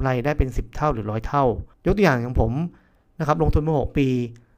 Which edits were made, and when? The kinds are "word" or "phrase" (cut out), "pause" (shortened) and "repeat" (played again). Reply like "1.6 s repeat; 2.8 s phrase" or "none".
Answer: 1.7 s pause